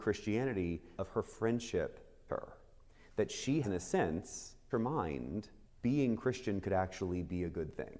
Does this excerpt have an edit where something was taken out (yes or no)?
yes